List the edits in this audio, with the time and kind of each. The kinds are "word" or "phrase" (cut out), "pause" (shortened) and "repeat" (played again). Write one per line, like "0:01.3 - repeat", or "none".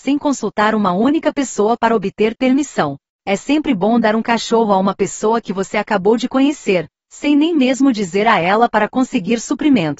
none